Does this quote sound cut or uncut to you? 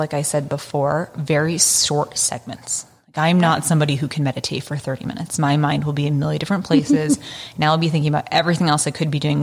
uncut